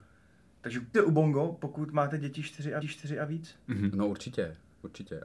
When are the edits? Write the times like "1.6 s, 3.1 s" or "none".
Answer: 0.9 s, 2.8 s